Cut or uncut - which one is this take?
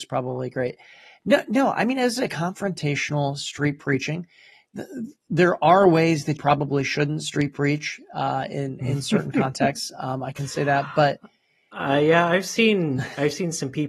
cut